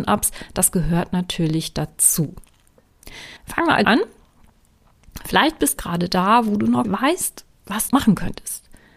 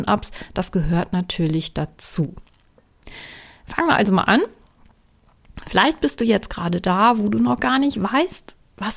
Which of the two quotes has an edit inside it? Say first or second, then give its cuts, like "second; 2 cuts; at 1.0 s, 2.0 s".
first; 5 cuts; at 3.4 s, 3.8 s, 5.8 s, 6.8 s, 7.9 s